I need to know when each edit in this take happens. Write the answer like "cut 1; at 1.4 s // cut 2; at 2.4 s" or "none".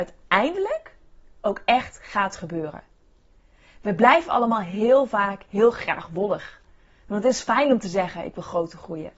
none